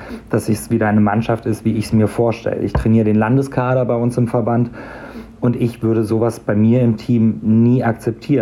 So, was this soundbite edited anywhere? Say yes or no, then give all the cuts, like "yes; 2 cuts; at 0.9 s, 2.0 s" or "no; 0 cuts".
no; 0 cuts